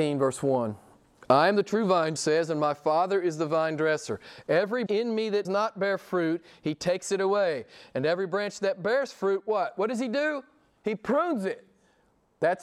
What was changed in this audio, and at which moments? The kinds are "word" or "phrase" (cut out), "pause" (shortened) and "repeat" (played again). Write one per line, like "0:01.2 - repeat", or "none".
0:02.2 - word
0:04.9 - word
0:05.4 - word